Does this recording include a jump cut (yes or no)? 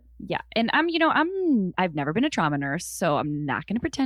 no